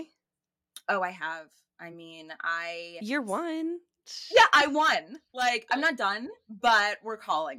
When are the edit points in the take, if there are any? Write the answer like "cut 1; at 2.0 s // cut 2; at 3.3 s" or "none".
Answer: none